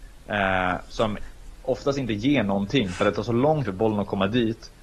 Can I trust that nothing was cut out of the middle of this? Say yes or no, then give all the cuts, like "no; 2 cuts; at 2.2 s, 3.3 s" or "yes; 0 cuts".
no; 1 cut; at 3.6 s